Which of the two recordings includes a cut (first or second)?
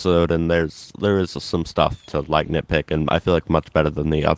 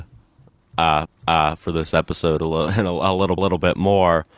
second